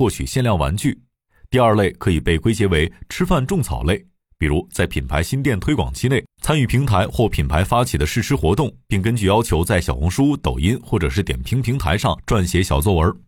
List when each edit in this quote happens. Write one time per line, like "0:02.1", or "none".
0:06.3